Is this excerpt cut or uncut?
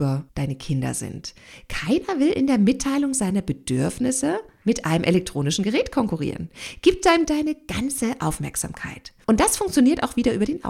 cut